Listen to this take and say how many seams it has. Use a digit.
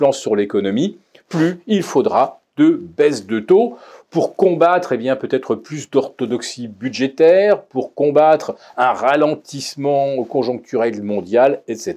0